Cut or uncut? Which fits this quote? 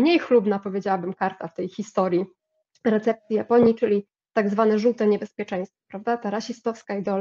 uncut